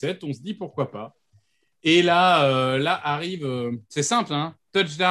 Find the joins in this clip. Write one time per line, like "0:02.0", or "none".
0:03.8